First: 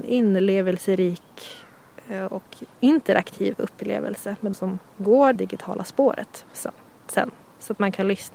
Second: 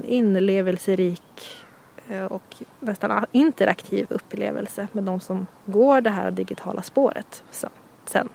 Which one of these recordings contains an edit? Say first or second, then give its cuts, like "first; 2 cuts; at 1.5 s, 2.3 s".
first; 3 cuts; at 2.7 s, 4.5 s, 5.4 s